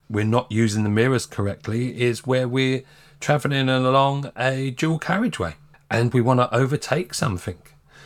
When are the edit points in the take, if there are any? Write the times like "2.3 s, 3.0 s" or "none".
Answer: none